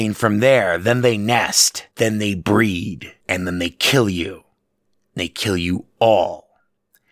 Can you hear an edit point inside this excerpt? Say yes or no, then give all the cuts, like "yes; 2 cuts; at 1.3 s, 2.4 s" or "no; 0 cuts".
yes; 2 cuts; at 1.9 s, 3.2 s